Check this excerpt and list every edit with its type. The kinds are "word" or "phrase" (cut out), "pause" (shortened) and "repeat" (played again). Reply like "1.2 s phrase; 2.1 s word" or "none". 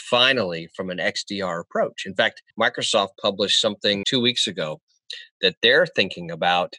2.5 s pause; 4.0 s word